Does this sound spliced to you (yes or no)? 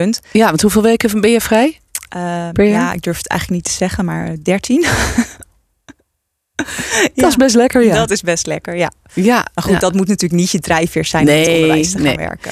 no